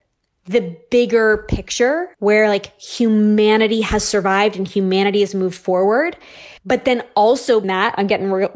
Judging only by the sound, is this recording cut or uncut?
cut